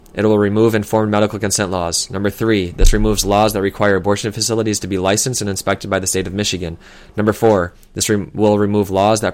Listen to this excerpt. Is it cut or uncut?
uncut